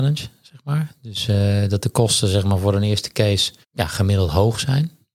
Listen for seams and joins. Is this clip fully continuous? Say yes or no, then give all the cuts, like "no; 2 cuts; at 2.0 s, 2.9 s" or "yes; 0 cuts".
no; 1 cut; at 3.6 s